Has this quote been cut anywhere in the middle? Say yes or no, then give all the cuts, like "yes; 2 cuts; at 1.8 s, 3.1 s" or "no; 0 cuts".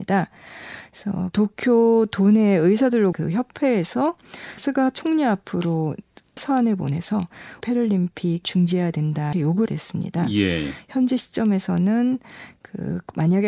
yes; 8 cuts; at 1.3 s, 3.1 s, 4.6 s, 6.4 s, 7.6 s, 8.4 s, 9.3 s, 9.7 s